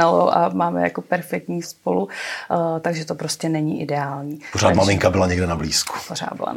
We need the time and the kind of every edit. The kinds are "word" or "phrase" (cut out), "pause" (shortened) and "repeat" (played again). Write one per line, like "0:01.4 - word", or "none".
0:01.6 - word